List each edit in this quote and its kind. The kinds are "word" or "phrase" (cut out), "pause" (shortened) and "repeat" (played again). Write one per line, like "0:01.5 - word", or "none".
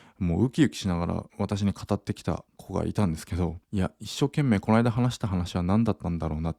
0:01.3 - pause
0:02.5 - pause
0:03.6 - pause